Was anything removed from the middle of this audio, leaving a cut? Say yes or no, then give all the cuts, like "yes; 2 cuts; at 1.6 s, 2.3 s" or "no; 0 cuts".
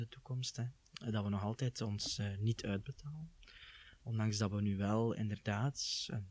no; 0 cuts